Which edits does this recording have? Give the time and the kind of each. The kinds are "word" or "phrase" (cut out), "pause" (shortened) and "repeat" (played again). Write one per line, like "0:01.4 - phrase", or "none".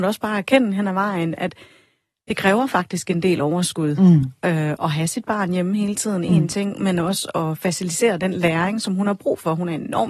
none